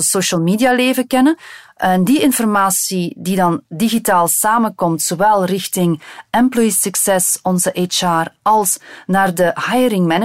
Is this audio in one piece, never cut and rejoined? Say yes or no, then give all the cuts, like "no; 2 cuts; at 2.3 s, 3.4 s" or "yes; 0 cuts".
yes; 0 cuts